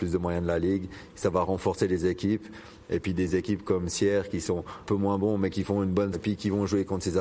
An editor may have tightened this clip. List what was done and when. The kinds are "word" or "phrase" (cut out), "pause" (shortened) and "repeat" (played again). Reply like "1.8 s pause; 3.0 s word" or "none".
4.8 s word; 6.1 s word